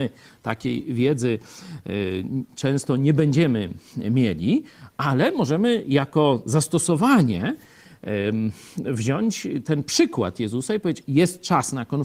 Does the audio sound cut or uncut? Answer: uncut